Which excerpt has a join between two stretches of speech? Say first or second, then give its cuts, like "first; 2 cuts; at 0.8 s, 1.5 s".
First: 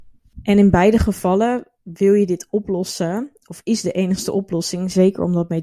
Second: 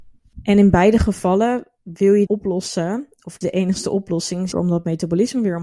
second; 3 cuts; at 2.3 s, 3.4 s, 4.5 s